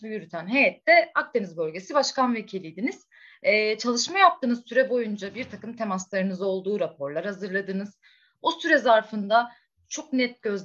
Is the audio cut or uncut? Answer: uncut